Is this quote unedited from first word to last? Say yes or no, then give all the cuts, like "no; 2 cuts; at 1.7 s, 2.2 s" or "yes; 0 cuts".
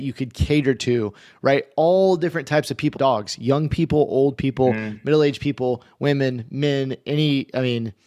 no; 1 cut; at 3.0 s